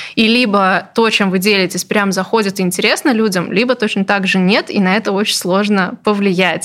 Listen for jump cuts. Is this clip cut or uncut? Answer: uncut